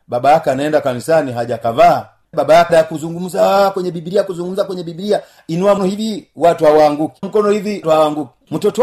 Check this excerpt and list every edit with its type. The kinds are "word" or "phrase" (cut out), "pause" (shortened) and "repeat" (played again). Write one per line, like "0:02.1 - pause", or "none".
0:02.3 - word
0:02.7 - word
0:05.8 - word
0:07.2 - word
0:07.8 - word